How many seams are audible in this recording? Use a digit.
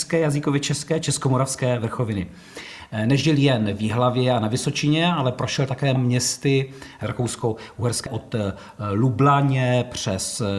2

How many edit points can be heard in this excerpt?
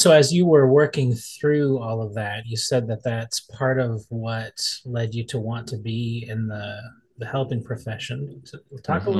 0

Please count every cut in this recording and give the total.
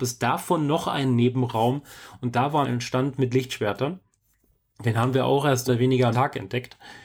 3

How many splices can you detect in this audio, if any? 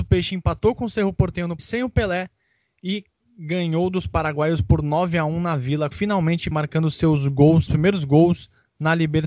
4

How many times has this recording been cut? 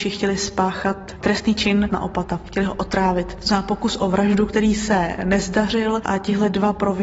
1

